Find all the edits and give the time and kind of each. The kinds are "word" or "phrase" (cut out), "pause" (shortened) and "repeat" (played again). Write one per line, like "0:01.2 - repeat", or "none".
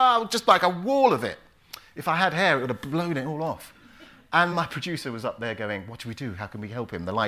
0:04.5 - word